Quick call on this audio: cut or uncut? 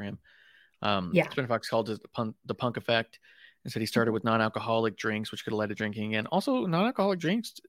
uncut